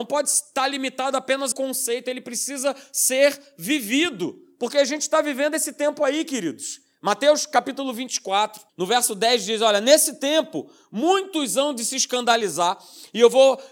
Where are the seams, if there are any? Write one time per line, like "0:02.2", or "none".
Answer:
0:01.5
0:08.7

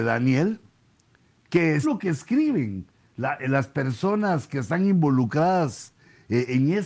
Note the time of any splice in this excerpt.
0:01.8

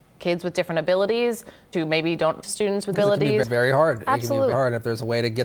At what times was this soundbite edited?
0:01.7
0:02.4
0:02.9
0:03.4
0:04.5

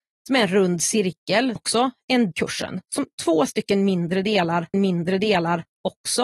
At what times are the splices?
0:01.6
0:02.3
0:04.7

